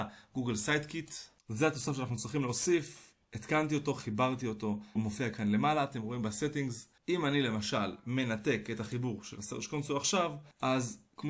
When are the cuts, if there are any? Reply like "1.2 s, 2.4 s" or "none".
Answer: 5.0 s